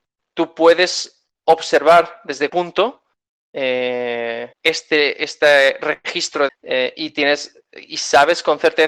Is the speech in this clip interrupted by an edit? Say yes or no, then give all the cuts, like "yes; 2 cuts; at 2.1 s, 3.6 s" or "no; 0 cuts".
yes; 4 cuts; at 1.3 s, 2.5 s, 4.5 s, 6.5 s